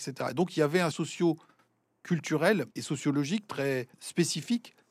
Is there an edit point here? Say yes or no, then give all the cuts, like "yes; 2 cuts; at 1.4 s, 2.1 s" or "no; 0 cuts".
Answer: yes; 3 cuts; at 0.9 s, 2.7 s, 3.9 s